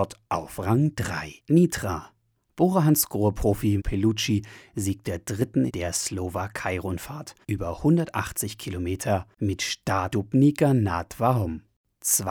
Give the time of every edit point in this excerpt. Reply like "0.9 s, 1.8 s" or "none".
1.4 s, 3.8 s, 5.0 s, 5.7 s, 7.4 s, 10.1 s